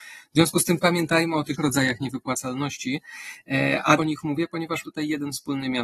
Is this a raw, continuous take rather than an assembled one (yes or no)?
no